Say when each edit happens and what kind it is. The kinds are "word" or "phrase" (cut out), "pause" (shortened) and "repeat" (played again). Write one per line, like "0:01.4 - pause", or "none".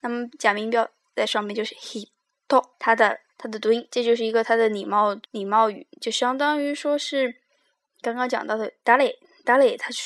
0:02.7 - pause
0:03.3 - pause
0:05.3 - pause